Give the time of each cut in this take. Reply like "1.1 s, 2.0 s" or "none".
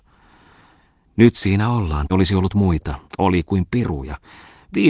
2.1 s, 3.1 s